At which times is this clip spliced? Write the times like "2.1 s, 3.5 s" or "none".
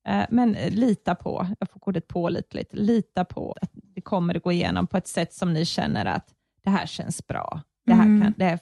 3.5 s